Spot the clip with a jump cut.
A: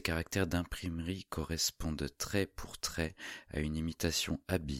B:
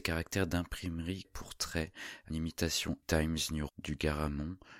B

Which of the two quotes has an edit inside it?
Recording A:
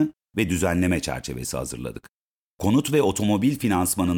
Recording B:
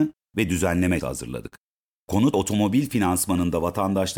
B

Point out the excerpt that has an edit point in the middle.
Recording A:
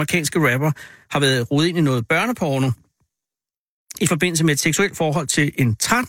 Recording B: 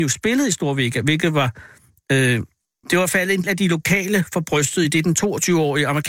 B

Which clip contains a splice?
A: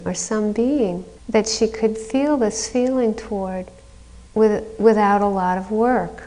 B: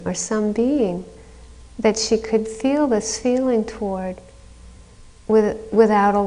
A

